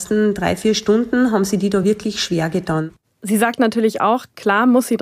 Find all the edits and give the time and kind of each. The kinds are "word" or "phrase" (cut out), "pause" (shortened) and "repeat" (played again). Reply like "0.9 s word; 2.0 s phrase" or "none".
none